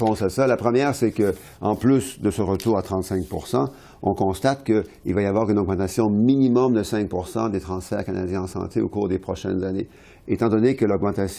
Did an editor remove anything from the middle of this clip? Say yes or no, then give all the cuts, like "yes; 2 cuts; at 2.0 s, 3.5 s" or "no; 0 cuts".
no; 0 cuts